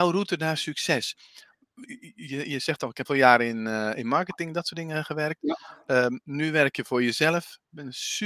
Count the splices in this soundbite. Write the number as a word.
one